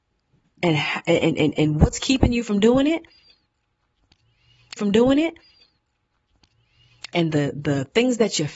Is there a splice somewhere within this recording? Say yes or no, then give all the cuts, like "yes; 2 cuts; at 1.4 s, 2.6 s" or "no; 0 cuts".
yes; 1 cut; at 4.8 s